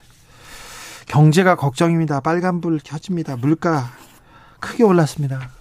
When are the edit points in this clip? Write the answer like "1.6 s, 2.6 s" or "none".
none